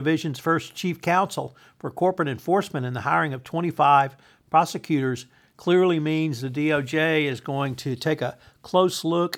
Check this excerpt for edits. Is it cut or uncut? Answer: uncut